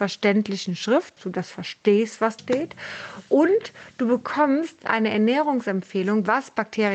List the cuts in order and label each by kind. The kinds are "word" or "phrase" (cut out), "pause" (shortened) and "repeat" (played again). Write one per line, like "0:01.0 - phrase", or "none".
0:01.2 - word
0:02.4 - word
0:04.8 - word